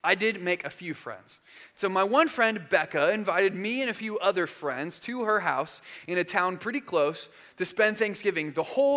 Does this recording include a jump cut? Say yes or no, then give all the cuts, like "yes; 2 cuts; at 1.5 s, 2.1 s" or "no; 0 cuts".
no; 0 cuts